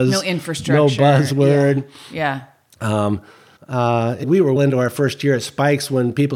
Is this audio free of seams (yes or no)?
no